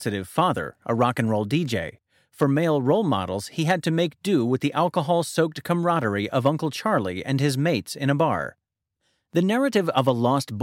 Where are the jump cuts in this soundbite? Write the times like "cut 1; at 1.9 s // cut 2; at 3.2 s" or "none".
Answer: none